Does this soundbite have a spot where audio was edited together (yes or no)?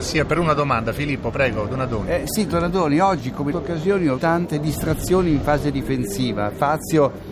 yes